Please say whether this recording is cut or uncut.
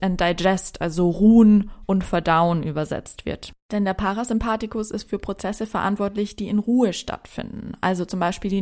uncut